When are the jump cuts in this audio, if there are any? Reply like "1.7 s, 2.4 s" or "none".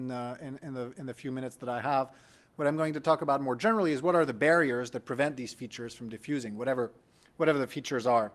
none